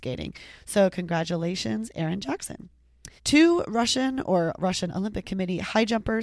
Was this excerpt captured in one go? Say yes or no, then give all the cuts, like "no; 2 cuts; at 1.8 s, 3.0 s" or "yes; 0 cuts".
no; 1 cut; at 3.2 s